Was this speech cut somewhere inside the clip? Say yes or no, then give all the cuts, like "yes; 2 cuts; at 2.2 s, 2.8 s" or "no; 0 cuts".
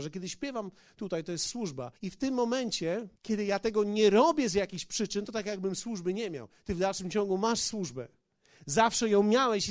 yes; 2 cuts; at 2.0 s, 3.2 s